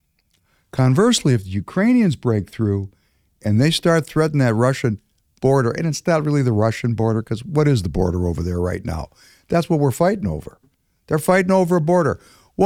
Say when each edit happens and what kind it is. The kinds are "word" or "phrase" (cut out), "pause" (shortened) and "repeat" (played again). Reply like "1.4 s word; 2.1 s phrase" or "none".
none